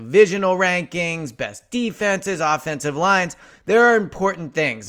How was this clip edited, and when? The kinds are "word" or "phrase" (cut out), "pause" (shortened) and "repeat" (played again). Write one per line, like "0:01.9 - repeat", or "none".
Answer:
none